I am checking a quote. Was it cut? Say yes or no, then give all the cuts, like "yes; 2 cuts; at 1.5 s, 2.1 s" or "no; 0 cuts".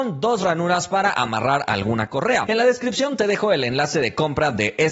no; 0 cuts